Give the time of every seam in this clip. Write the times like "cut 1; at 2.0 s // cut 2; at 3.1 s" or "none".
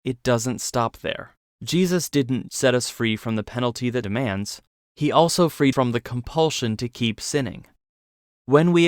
cut 1; at 2.5 s // cut 2; at 4.0 s // cut 3; at 4.7 s // cut 4; at 5.7 s